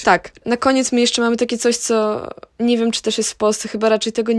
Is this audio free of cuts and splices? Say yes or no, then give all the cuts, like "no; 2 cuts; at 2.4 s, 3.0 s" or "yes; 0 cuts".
yes; 0 cuts